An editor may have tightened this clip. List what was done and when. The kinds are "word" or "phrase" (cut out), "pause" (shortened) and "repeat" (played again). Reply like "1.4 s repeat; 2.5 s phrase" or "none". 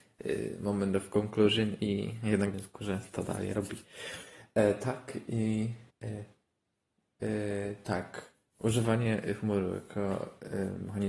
2.5 s word; 5.9 s pause